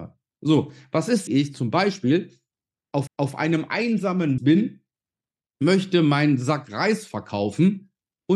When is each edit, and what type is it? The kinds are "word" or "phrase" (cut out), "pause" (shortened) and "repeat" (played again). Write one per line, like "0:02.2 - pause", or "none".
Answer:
0:01.3 - phrase
0:03.1 - repeat
0:04.4 - word